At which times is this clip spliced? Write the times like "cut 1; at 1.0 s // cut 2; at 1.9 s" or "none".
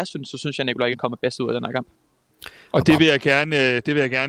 cut 1; at 0.9 s